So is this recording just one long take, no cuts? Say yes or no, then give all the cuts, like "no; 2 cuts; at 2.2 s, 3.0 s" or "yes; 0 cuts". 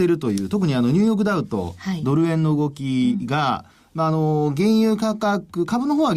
yes; 0 cuts